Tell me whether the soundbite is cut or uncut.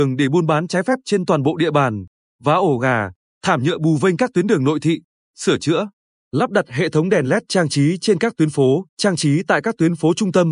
cut